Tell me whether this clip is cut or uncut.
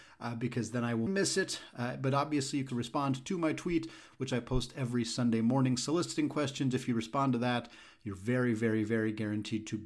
cut